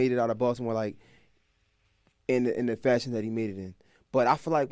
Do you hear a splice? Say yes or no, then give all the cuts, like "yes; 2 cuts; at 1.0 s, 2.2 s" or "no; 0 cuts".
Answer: no; 0 cuts